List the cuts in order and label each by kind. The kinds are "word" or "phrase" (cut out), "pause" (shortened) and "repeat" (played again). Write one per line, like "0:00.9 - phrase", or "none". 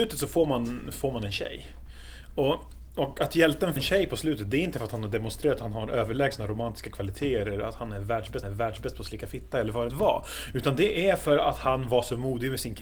0:03.8 - word
0:08.4 - repeat
0:09.9 - phrase